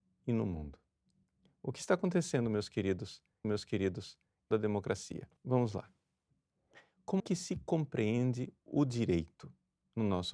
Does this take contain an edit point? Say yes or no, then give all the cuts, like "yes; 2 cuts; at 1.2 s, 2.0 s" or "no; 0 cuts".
yes; 4 cuts; at 3.4 s, 4.5 s, 5.4 s, 7.2 s